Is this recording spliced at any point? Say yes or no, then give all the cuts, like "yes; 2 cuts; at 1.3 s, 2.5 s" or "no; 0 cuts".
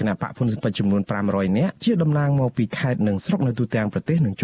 yes; 1 cut; at 1.8 s